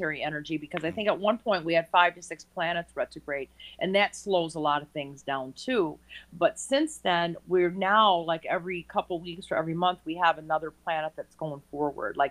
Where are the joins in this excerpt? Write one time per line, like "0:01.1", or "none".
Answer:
none